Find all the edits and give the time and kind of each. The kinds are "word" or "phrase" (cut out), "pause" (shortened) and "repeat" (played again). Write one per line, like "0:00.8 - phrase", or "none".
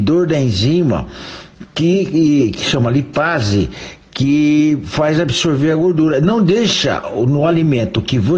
none